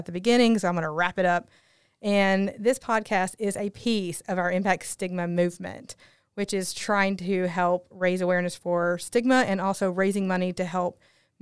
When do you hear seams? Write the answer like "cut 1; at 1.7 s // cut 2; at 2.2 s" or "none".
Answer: none